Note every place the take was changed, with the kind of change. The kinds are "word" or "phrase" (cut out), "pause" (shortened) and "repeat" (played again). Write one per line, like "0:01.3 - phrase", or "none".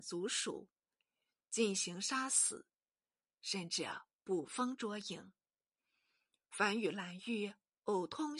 none